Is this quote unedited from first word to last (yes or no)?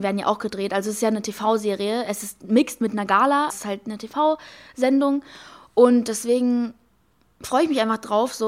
no